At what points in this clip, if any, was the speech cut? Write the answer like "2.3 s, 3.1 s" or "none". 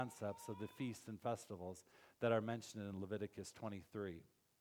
none